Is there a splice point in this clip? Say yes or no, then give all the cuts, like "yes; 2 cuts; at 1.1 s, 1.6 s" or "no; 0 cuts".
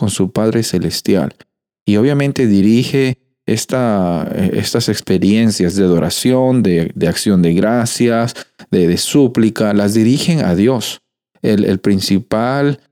no; 0 cuts